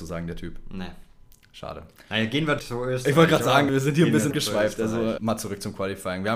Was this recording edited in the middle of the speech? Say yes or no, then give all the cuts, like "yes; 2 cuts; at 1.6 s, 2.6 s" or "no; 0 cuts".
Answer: yes; 4 cuts; at 2.6 s, 3.7 s, 4.3 s, 5.2 s